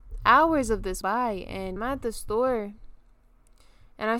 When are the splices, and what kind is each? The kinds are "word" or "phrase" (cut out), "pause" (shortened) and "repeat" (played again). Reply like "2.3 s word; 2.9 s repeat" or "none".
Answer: 1.0 s word; 1.8 s word